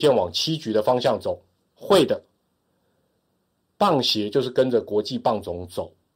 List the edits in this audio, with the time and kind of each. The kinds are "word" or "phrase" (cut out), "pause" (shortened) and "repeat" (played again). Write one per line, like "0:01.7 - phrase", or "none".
none